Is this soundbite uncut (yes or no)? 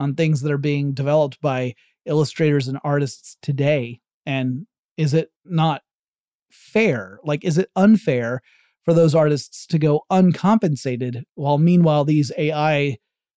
no